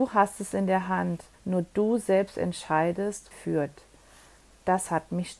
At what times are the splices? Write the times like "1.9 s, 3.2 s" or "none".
1.3 s, 3.3 s